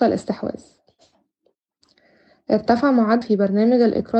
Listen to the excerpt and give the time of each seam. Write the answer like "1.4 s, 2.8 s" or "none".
3.2 s